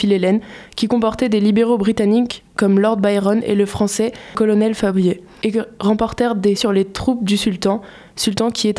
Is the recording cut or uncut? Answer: cut